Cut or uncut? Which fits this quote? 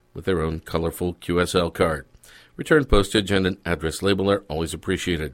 uncut